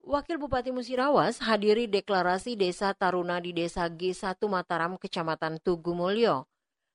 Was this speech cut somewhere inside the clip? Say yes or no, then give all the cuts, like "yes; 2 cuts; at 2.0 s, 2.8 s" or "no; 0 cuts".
no; 0 cuts